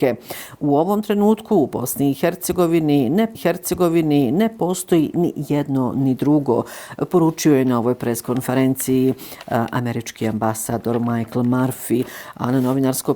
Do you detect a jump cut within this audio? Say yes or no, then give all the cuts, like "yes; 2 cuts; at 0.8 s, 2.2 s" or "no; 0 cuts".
yes; 1 cut; at 3.3 s